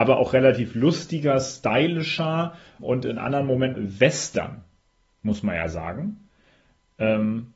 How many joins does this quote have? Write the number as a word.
two